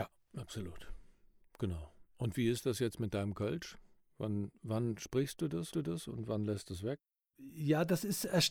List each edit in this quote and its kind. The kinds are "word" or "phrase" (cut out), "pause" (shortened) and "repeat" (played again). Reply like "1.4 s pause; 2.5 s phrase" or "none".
5.7 s repeat

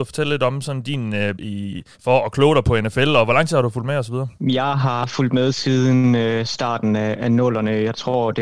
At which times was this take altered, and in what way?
1.4 s word; 1.9 s pause; 4.4 s pause

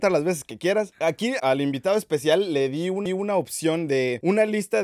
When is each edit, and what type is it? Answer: 1.4 s word; 3.1 s repeat

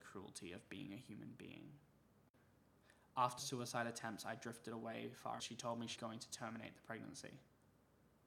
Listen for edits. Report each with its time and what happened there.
3.4 s word; 5.4 s phrase; 6.0 s word

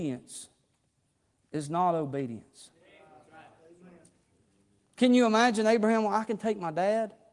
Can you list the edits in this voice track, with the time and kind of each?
none

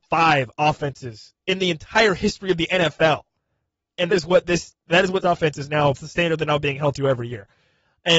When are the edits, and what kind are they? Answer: 4.1 s word; 5.2 s phrase; 5.9 s word

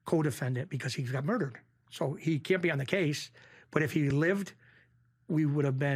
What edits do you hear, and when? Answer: none

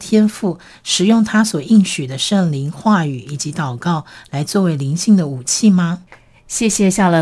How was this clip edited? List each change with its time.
none

